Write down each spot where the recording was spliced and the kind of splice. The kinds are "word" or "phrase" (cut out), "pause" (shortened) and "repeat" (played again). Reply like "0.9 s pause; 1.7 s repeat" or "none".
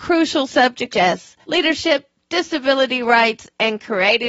0.9 s word; 1.4 s pause